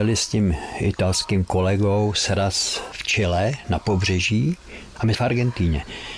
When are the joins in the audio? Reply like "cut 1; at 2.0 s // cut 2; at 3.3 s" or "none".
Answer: cut 1; at 5.1 s